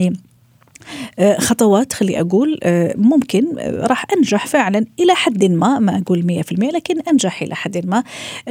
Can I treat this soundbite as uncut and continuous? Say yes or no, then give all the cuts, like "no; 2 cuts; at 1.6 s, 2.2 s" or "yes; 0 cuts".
yes; 0 cuts